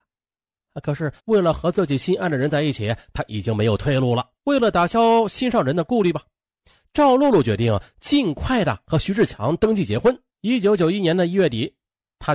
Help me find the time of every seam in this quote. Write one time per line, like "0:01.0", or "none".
0:01.2
0:04.4
0:10.3